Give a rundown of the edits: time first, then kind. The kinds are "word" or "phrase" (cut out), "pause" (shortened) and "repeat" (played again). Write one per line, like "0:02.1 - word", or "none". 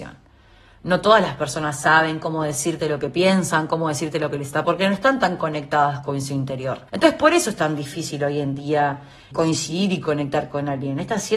0:04.6 - word
0:06.9 - pause
0:09.3 - word